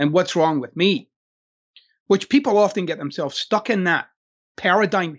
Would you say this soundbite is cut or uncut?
uncut